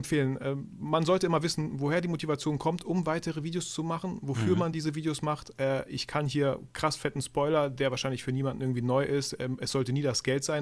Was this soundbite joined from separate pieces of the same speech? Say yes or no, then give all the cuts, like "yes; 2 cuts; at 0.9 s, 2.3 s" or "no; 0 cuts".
no; 0 cuts